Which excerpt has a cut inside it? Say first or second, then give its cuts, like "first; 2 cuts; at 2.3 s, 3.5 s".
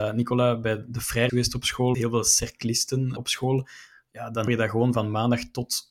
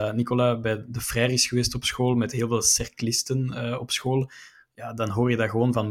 first; 4 cuts; at 1.3 s, 1.9 s, 3.2 s, 4.5 s